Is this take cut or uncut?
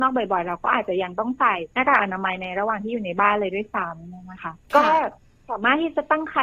cut